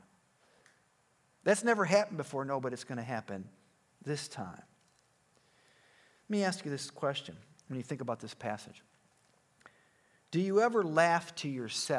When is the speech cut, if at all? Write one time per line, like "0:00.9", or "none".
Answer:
none